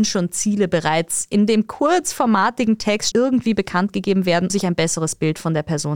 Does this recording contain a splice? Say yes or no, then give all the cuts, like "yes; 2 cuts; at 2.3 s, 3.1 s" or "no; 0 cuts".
yes; 2 cuts; at 3.1 s, 4.5 s